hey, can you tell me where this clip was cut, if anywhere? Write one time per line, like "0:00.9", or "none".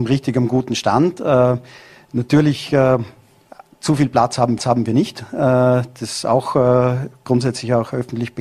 0:04.6